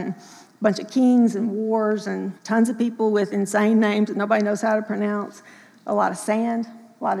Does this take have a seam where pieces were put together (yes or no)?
yes